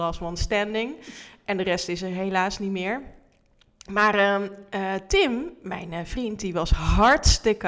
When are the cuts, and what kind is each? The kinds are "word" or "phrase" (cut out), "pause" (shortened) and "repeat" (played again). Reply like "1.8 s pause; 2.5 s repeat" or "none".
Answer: none